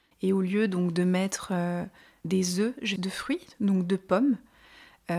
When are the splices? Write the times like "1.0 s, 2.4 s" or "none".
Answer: 2.2 s, 3.0 s